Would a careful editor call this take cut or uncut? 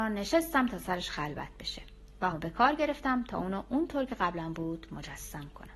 cut